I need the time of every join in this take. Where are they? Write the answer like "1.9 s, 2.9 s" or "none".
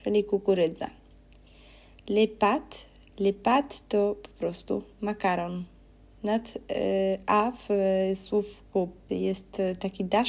9.1 s

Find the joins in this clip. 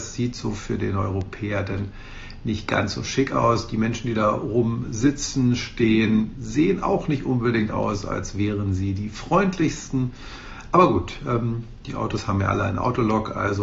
none

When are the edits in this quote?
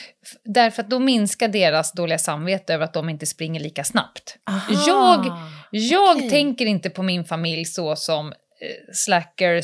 4.4 s

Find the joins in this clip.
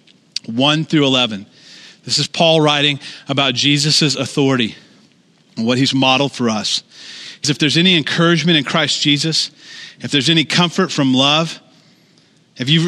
7.4 s

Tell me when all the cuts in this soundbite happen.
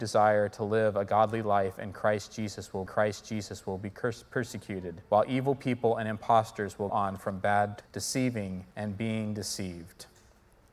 2.9 s, 5.1 s, 6.9 s, 7.8 s, 8.7 s

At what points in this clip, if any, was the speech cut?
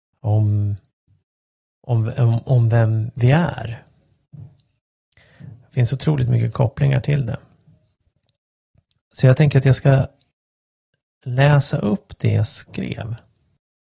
none

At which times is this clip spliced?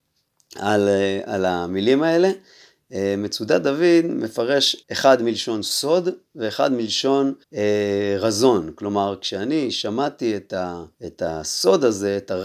4.8 s, 7.4 s, 10.9 s

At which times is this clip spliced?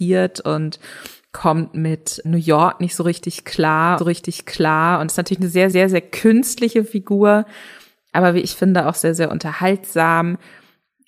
2.2 s, 4.0 s, 5.7 s

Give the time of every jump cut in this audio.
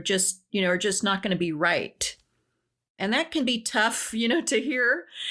none

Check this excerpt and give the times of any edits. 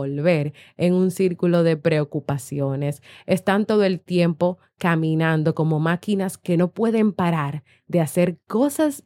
none

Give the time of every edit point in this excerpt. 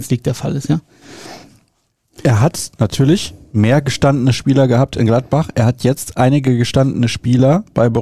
none

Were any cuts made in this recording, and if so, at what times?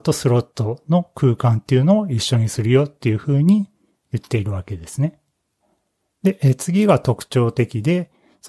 none

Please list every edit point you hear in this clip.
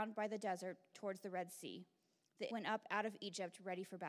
0.9 s, 2.5 s

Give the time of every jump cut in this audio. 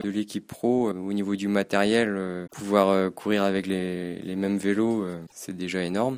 0.9 s

